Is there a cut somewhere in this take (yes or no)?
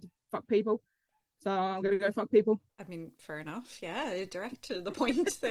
no